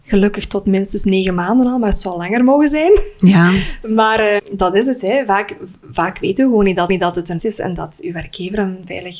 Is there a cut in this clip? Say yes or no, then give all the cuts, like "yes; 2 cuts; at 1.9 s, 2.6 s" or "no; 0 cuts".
yes; 3 cuts; at 4.4 s, 6.9 s, 7.4 s